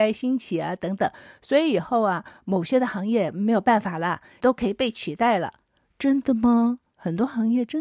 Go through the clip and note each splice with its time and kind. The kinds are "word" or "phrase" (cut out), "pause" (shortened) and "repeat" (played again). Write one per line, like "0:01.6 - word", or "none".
0:04.4 - word